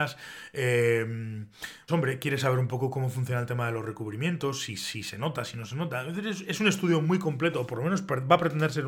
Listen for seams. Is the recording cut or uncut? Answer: cut